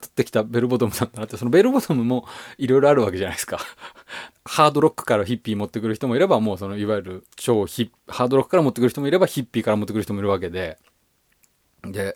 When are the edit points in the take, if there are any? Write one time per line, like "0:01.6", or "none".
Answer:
0:04.3
0:07.3
0:08.0